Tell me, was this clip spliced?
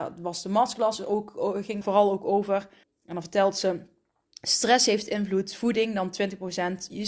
yes; 2 cuts; at 1.8 s, 2.8 s

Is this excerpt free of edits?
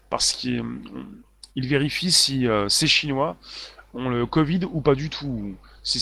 no; 1 cut; at 1.5 s

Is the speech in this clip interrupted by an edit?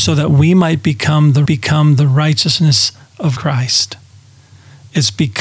yes; 2 cuts; at 1.5 s, 3.4 s

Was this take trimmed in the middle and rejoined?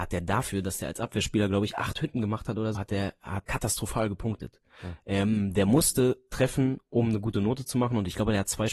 yes; 2 cuts; at 2.7 s, 3.4 s

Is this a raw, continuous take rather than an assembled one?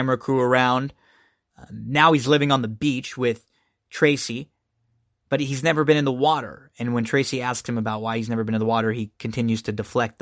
yes; 0 cuts

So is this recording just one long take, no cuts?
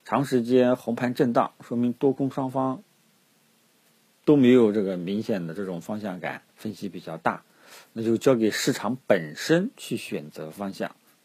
no; 1 cut; at 6.5 s

